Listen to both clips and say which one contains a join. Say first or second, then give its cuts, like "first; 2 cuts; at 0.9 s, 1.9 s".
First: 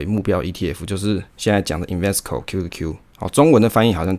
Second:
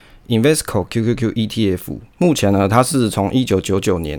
second; 1 cut; at 2.1 s